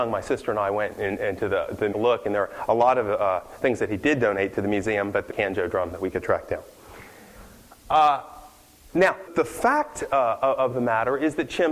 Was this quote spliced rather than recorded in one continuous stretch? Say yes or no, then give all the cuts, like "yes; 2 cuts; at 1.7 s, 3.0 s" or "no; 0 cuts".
yes; 3 cuts; at 1.9 s, 5.3 s, 9.3 s